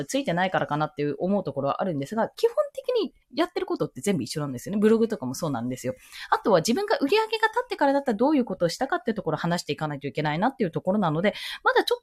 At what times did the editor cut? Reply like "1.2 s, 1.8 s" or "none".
3.2 s